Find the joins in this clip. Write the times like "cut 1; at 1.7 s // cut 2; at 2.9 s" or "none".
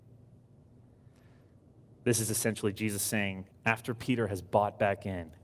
cut 1; at 3.5 s